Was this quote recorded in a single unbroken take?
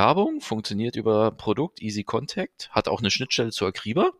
yes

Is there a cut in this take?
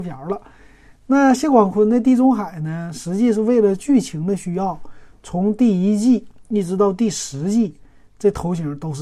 no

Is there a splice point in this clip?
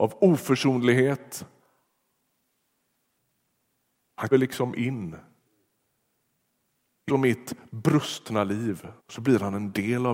yes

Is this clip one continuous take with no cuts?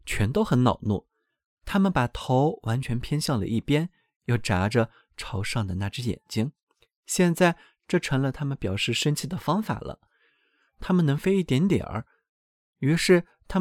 yes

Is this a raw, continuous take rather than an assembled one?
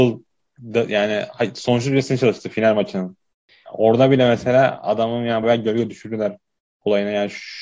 no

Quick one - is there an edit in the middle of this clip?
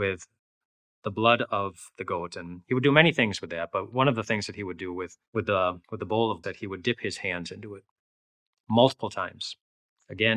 yes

